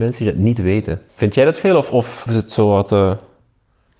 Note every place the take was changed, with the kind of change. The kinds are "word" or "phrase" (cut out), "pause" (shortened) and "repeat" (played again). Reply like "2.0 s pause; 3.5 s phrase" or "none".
1.1 s pause; 2.3 s word

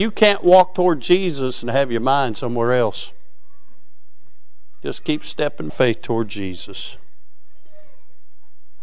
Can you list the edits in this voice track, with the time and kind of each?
5.7 s word

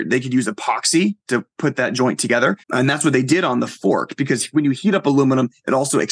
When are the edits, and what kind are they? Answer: 1.2 s pause; 2.6 s pause

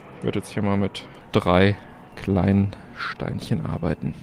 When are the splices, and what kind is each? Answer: none

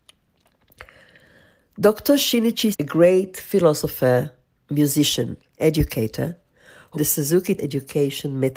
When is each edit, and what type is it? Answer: 2.7 s word; 5.6 s word; 6.9 s word; 7.6 s word

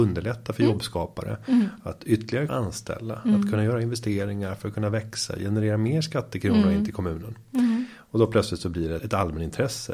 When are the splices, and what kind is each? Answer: 2.5 s word; 9.0 s word

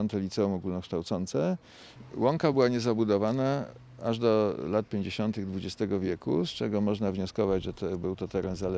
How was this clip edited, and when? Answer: none

